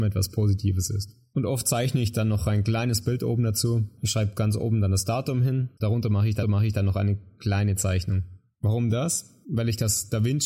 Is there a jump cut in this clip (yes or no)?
yes